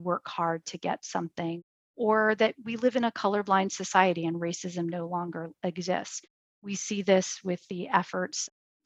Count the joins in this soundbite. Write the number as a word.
zero